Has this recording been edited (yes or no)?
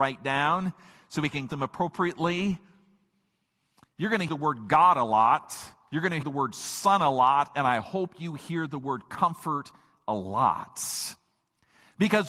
yes